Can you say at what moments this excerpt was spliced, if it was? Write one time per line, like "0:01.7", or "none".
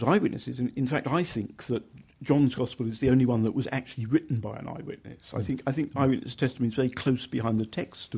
none